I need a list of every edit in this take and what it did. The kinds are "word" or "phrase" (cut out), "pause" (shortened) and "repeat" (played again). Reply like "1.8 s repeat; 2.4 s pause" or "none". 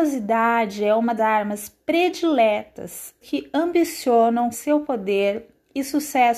1.2 s word; 3.2 s word; 4.5 s word

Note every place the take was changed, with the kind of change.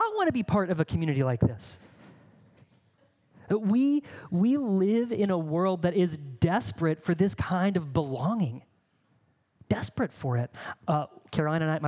none

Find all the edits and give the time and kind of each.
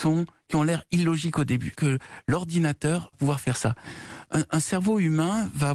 1.8 s word; 3.1 s word

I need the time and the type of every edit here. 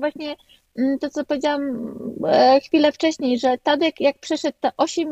none

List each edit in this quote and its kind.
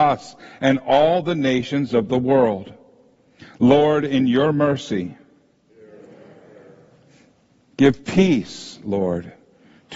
none

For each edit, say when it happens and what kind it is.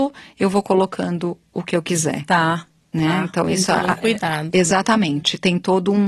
none

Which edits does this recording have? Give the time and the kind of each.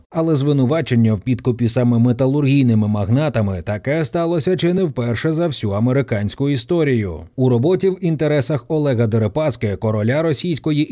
none

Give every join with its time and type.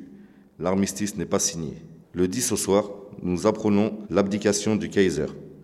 2.0 s pause

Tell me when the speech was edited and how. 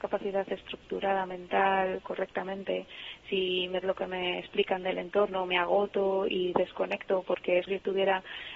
3.8 s phrase; 7.7 s word

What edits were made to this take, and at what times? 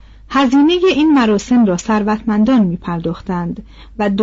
none

